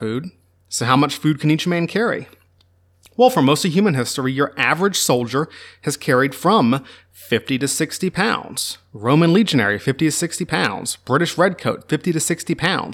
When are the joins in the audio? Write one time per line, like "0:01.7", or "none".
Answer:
none